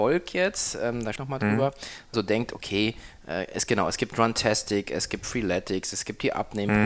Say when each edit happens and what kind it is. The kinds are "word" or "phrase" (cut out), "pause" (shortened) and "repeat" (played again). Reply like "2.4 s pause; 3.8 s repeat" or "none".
1.2 s phrase; 2.1 s phrase